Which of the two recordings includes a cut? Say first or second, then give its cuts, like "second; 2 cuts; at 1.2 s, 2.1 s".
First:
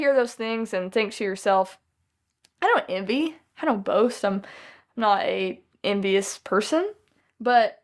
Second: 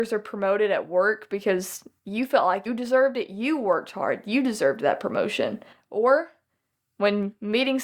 second; 1 cut; at 2.7 s